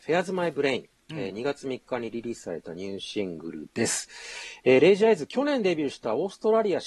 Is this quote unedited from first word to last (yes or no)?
yes